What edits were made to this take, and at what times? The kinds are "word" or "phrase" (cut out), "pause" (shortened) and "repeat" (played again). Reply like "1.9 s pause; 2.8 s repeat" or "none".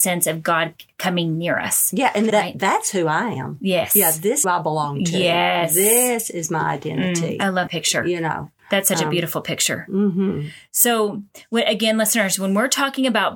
2.3 s word; 4.4 s phrase; 7.7 s word; 8.6 s pause